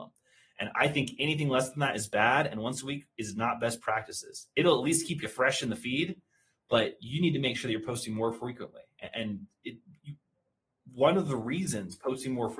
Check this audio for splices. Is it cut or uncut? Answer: uncut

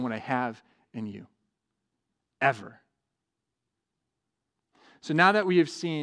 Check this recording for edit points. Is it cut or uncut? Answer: uncut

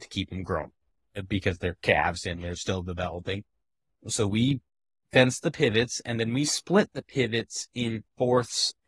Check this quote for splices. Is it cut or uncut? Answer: uncut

